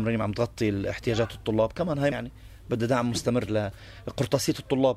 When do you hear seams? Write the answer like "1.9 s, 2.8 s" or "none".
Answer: 2.1 s